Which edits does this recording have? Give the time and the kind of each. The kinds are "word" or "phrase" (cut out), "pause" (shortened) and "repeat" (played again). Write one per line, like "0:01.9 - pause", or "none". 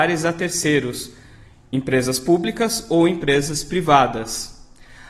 none